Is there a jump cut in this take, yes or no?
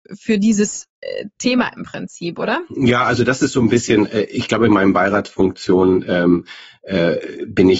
no